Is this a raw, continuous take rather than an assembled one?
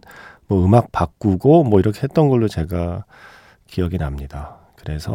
yes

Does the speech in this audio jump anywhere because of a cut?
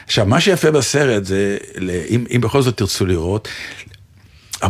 no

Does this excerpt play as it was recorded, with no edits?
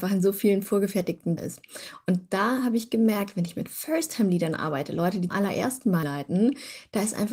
no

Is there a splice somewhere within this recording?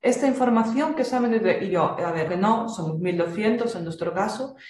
yes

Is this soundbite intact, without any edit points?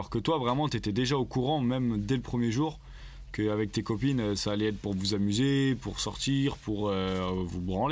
yes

